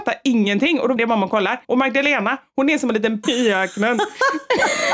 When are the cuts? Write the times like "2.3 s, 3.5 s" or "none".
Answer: 1.0 s, 1.6 s, 3.2 s